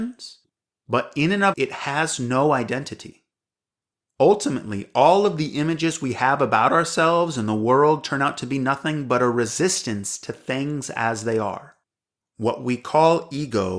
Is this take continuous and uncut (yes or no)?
no